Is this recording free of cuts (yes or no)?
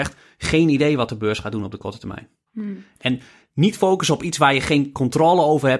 yes